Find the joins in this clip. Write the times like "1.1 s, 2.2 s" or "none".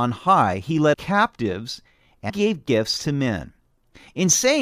0.9 s, 2.3 s